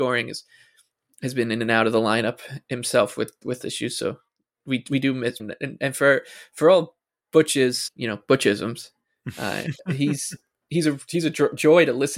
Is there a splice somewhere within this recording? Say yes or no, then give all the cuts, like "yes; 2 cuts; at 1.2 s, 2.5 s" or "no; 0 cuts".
yes; 3 cuts; at 3.6 s, 5.4 s, 7.9 s